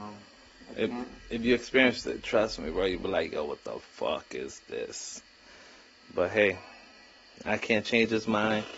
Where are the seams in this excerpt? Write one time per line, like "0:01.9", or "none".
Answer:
none

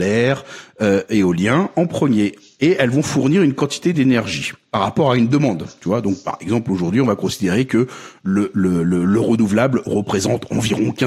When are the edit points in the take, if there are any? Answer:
none

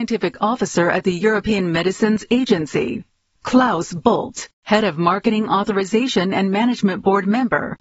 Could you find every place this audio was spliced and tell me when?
none

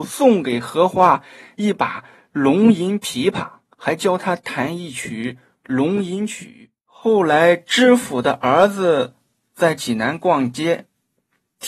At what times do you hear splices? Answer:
0:06.8

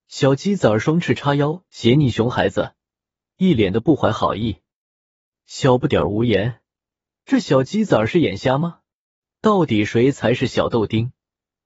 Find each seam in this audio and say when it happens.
none

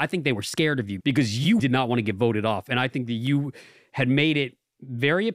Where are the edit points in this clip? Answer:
0:01.0
0:01.6

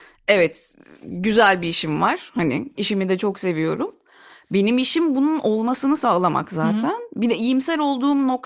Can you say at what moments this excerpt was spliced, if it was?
none

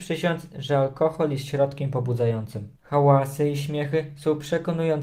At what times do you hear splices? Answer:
0:02.7

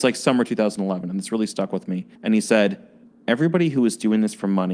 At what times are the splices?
0:02.1
0:03.0

